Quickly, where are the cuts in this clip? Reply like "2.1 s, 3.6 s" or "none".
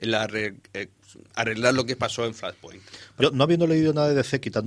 3.2 s